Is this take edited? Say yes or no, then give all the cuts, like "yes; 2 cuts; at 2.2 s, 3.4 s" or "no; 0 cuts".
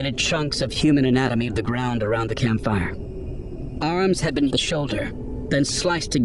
yes; 2 cuts; at 1.5 s, 4.5 s